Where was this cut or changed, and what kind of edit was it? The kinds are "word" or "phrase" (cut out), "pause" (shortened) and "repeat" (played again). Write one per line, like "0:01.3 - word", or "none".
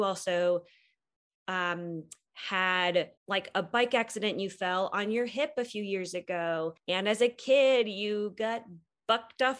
0:03.2 - pause
0:06.8 - pause